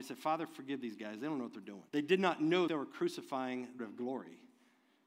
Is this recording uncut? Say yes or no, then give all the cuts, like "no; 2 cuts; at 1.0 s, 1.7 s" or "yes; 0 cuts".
no; 3 cuts; at 1.9 s, 2.7 s, 3.8 s